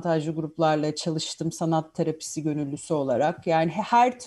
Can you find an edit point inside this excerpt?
no; 0 cuts

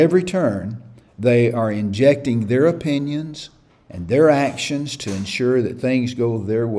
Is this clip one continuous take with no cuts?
yes; 0 cuts

